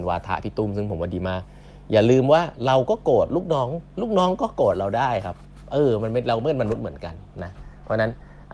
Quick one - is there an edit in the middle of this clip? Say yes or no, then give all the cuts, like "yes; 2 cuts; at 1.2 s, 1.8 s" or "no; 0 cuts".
no; 0 cuts